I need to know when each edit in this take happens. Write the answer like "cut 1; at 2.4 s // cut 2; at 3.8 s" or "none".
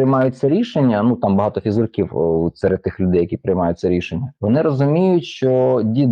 cut 1; at 4.4 s